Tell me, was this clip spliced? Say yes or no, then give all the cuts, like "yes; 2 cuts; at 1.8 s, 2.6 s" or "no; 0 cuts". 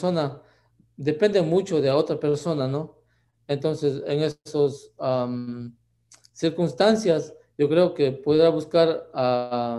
no; 0 cuts